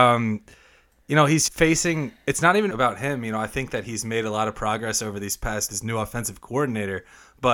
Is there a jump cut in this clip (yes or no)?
yes